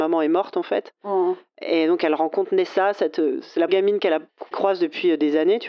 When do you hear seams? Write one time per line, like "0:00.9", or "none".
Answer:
0:03.7
0:04.5